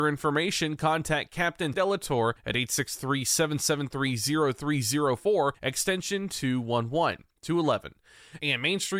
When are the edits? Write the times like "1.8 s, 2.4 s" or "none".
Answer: 1.7 s, 2.4 s, 5.5 s